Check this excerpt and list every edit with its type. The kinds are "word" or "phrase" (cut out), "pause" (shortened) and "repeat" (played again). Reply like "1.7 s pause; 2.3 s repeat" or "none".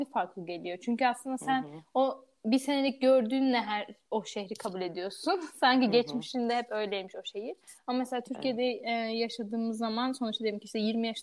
none